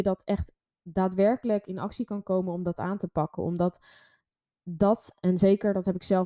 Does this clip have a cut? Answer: no; 0 cuts

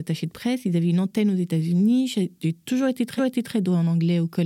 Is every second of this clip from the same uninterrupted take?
no; 1 cut; at 3.2 s

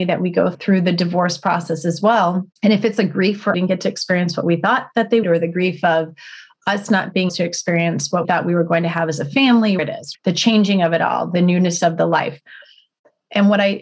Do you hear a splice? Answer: yes; 6 cuts; at 2.5 s, 3.5 s, 5.2 s, 7.3 s, 8.2 s, 9.8 s

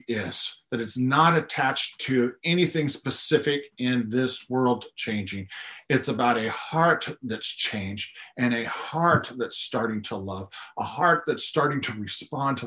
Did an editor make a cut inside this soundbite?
no; 0 cuts

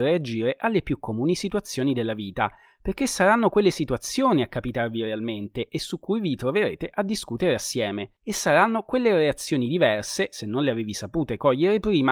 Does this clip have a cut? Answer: no; 0 cuts

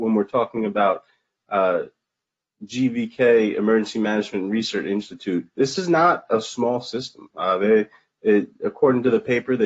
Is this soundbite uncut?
yes; 0 cuts

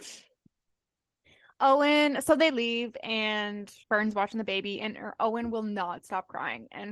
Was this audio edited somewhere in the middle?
yes; 1 cut; at 3.8 s

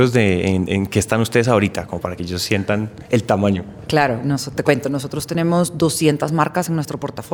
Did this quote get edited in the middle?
no; 0 cuts

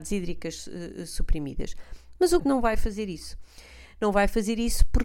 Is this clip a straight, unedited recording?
no; 1 cut; at 2.4 s

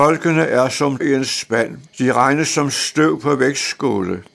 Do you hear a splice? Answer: yes; 2 cuts; at 1.0 s, 1.9 s

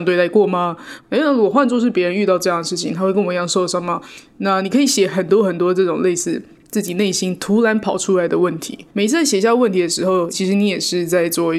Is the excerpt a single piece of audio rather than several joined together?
no; 1 cut; at 8.9 s

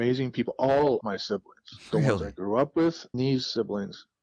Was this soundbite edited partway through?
yes; 2 cuts; at 1.0 s, 3.1 s

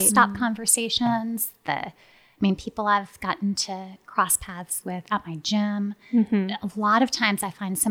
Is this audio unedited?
yes; 0 cuts

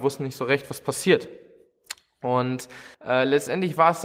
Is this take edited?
yes; 1 cut; at 2.9 s

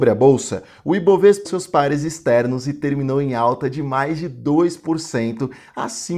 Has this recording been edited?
yes; 1 cut; at 1.4 s

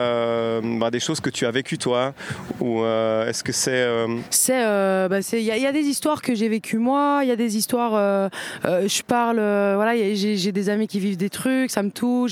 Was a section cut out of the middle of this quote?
no; 0 cuts

